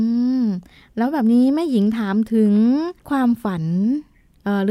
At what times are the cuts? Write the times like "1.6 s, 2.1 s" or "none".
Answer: 3.0 s